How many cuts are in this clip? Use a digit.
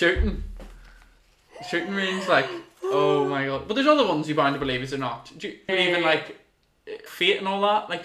2